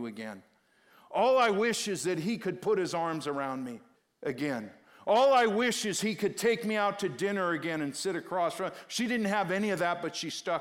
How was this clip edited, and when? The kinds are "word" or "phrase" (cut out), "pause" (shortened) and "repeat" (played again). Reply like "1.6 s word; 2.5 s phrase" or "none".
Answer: 4.0 s pause